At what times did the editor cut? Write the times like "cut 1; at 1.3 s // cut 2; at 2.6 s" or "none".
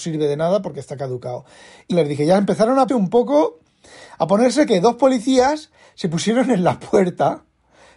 cut 1; at 1.9 s // cut 2; at 2.9 s